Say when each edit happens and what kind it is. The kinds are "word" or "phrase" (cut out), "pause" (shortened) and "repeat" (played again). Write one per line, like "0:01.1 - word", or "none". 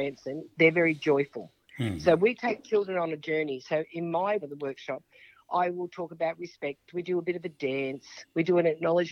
0:04.4 - word